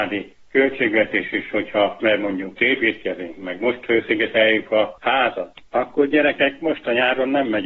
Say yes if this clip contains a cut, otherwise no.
yes